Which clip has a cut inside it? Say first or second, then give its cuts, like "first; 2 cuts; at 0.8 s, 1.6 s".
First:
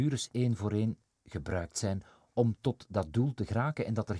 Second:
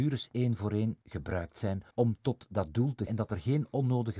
second; 3 cuts; at 1.0 s, 1.9 s, 3.1 s